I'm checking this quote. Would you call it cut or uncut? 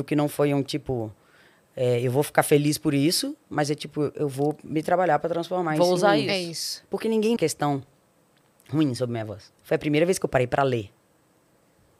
cut